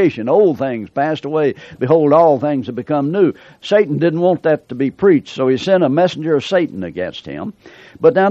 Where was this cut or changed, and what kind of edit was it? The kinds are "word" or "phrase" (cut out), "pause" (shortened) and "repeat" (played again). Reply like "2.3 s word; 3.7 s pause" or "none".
none